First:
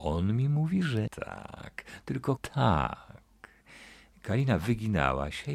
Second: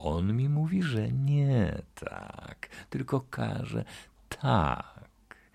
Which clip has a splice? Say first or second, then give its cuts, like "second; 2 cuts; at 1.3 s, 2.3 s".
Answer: first; 2 cuts; at 1.1 s, 2.4 s